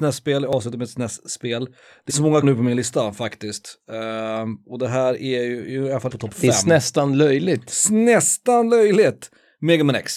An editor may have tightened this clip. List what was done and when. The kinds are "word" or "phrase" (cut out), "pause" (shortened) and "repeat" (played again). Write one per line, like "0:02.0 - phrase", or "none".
0:02.1 - word
0:02.4 - word
0:06.1 - word